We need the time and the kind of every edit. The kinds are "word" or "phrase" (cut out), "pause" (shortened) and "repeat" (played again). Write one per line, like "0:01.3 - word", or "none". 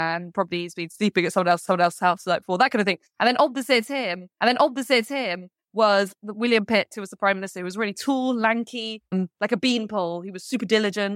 0:01.7 - repeat
0:04.4 - repeat